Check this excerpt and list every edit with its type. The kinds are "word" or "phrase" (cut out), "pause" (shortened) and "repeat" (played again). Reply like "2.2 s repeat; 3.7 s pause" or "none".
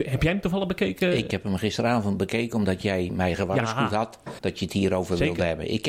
4.4 s word